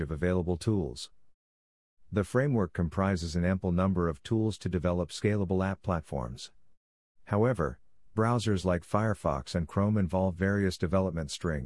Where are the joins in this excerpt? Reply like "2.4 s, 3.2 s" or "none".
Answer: none